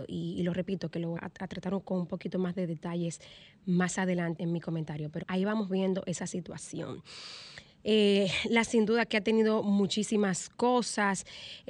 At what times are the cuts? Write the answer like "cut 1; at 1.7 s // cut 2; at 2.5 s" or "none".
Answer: cut 1; at 1.2 s // cut 2; at 4.4 s // cut 3; at 5.2 s // cut 4; at 8.7 s